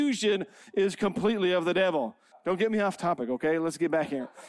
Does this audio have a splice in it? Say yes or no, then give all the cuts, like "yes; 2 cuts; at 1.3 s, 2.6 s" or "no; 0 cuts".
yes; 1 cut; at 2.3 s